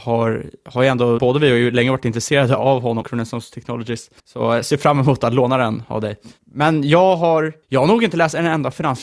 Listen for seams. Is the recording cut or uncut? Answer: cut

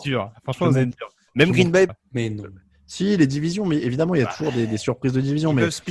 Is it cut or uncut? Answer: cut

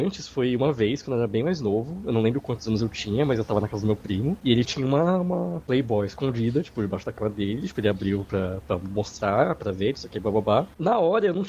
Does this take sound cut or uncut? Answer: cut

